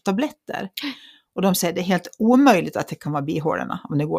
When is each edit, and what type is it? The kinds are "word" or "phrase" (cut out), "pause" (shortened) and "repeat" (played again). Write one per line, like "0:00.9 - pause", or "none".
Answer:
none